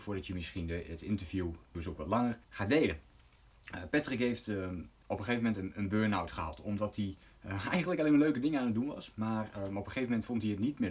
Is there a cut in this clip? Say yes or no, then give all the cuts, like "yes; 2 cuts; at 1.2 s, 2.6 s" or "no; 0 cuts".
yes; 2 cuts; at 1.7 s, 2.4 s